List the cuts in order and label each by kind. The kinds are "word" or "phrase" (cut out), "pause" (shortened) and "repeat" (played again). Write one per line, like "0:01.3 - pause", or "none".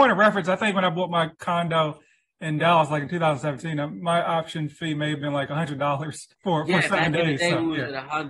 0:01.3 - pause
0:06.3 - pause